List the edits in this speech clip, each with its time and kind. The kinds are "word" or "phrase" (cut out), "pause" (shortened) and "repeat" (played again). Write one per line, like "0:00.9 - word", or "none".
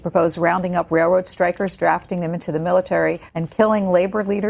0:03.3 - pause